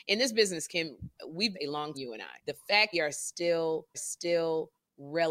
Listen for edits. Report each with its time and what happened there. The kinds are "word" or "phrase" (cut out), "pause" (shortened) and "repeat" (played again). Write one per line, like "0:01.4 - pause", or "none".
0:01.5 - phrase
0:01.9 - word
0:02.4 - pause
0:02.9 - phrase
0:03.9 - repeat